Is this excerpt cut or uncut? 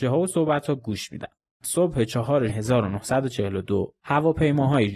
cut